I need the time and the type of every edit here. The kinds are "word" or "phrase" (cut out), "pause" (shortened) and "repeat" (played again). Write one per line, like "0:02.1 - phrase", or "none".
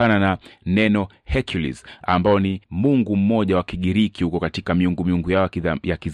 0:02.6 - pause